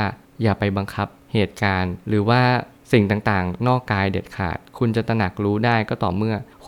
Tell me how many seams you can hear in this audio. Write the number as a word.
one